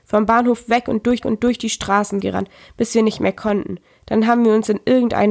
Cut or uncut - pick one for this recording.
cut